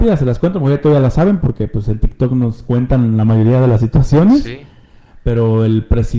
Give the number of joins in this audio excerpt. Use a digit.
0